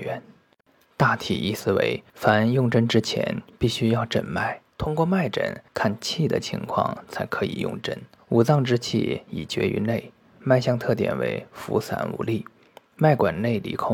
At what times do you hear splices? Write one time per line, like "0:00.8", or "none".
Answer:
0:02.1
0:04.7
0:05.7
0:08.2